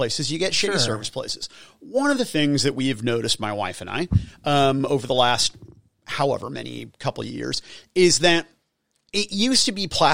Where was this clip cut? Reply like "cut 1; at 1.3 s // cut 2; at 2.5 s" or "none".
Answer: none